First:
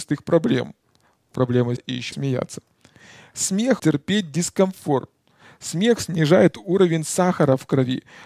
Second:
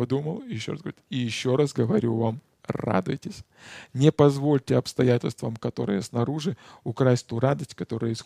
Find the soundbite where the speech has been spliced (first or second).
first